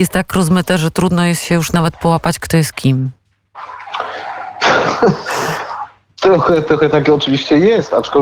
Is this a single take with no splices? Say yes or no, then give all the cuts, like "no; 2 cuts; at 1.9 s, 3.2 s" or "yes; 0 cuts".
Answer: yes; 0 cuts